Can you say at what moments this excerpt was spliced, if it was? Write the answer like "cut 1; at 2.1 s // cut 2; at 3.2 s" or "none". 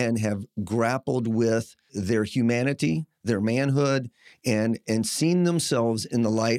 cut 1; at 1.9 s